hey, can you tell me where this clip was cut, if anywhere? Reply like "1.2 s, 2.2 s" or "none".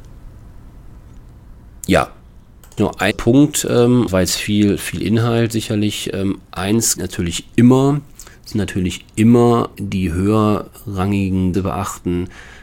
2.8 s, 3.1 s, 4.1 s, 7.0 s, 8.5 s, 9.7 s, 11.5 s